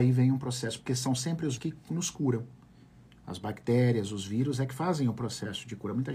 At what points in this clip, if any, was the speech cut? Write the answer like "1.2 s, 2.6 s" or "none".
1.6 s